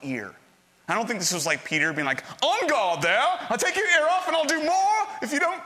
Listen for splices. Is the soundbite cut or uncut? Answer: uncut